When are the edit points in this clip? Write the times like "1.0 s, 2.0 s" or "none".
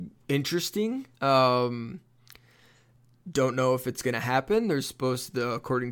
1.1 s